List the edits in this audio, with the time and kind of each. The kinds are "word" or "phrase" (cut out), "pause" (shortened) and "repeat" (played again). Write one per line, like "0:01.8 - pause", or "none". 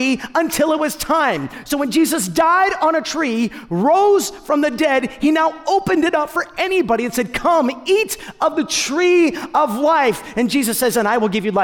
none

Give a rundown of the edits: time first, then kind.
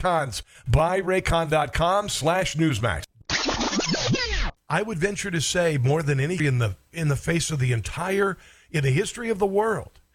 0:06.4 - word

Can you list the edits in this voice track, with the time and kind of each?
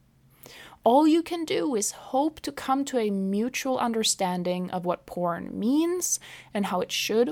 none

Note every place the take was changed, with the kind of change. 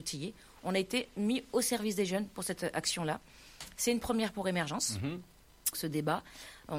0:05.7 - word

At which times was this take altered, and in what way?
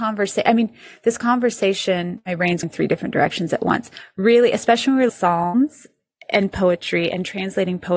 0:02.6 - word
0:05.1 - phrase

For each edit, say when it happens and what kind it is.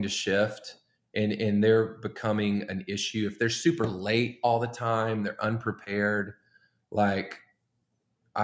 none

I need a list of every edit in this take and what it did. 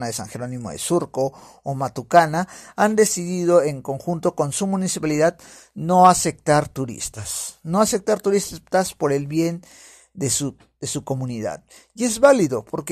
none

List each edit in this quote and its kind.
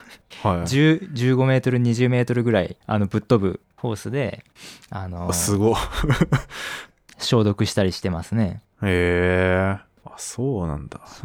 0:02.8 - pause

